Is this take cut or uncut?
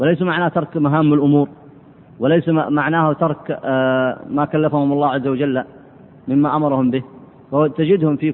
uncut